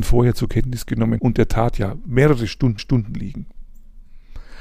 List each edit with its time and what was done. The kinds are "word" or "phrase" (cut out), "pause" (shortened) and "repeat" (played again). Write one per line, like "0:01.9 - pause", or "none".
0:01.2 - word
0:02.8 - repeat